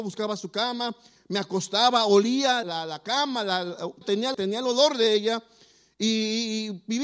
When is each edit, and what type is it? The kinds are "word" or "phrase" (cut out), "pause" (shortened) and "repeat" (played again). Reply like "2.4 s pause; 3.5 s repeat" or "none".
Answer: 2.6 s word; 4.0 s word; 4.3 s word